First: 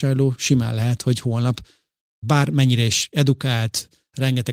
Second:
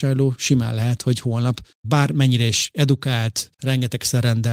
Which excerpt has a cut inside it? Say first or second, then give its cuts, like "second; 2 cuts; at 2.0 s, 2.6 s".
second; 2 cuts; at 1.7 s, 3.5 s